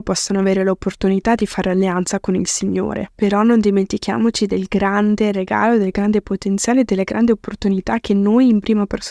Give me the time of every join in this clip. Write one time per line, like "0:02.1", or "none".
none

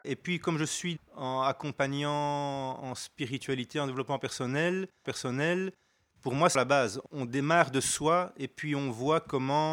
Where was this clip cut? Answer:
0:05.0
0:06.5

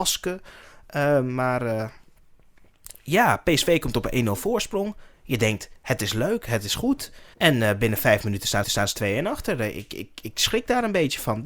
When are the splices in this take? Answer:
0:07.3
0:08.6

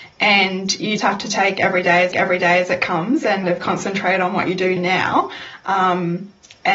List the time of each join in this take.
0:01.0
0:02.1
0:03.4
0:04.8

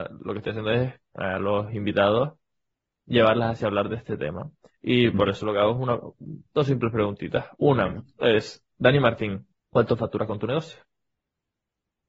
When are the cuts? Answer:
0:07.5
0:09.6

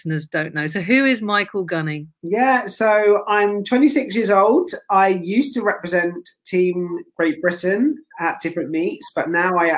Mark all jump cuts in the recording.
0:02.2

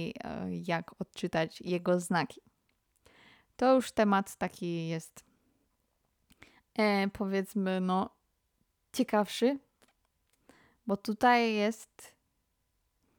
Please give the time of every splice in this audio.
none

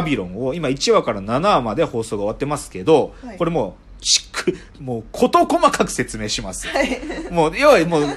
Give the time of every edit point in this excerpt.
0:04.7

